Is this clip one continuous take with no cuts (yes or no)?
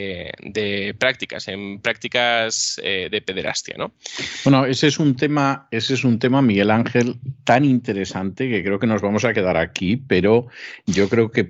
yes